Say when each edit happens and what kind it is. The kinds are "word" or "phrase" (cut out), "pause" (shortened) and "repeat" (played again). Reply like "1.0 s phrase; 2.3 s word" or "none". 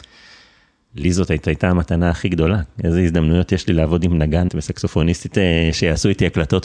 1.4 s repeat; 4.5 s word; 5.3 s word